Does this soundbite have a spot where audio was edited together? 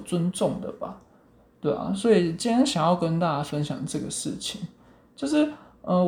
no; 0 cuts

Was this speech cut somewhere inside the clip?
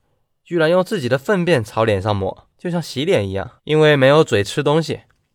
yes; 2 cuts; at 2.5 s, 3.6 s

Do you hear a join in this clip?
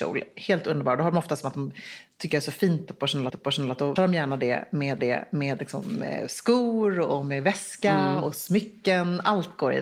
yes; 3 cuts; at 3.3 s, 4.0 s, 5.0 s

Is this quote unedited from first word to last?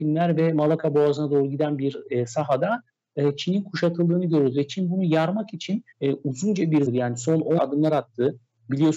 no; 3 cuts; at 5.9 s, 6.9 s, 7.6 s

